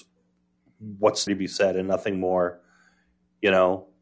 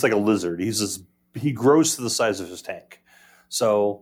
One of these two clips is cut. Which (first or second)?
first